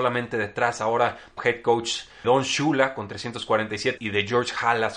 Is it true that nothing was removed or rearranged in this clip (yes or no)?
no